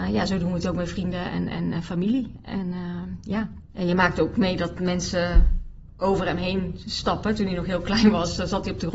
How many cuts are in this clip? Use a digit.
1